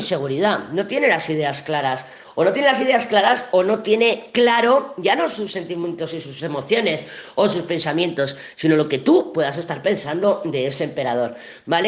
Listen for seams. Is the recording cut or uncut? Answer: uncut